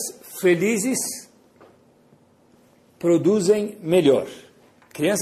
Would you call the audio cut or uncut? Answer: uncut